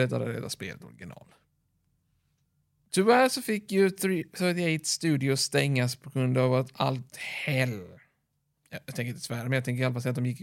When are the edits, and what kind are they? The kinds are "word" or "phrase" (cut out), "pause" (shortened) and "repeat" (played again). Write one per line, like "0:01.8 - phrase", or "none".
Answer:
0:07.1 - phrase